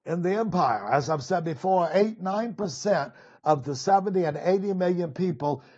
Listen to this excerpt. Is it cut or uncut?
uncut